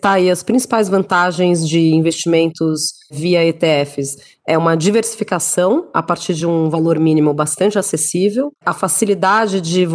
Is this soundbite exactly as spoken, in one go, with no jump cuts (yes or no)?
yes